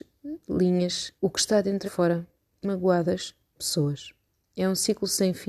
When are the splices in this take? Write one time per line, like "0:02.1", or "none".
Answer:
0:01.2
0:01.8
0:02.6
0:03.6